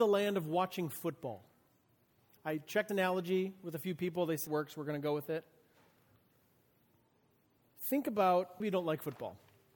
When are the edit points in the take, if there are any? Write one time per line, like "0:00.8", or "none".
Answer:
0:02.9
0:04.5
0:08.6